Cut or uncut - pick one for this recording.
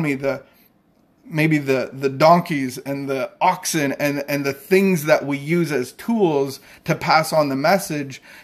uncut